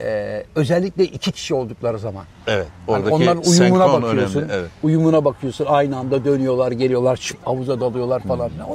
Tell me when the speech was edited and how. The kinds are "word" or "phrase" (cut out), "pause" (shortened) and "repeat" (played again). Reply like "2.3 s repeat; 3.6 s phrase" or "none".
none

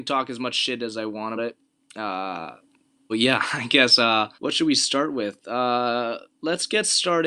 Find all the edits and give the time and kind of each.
1.4 s word; 3.1 s word; 4.3 s pause

